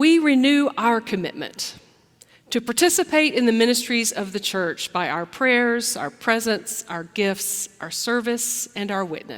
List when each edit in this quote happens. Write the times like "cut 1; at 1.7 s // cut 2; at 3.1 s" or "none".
none